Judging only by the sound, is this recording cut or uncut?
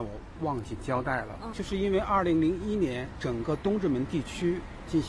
cut